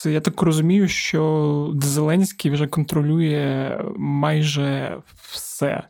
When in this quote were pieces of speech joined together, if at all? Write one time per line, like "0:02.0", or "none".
none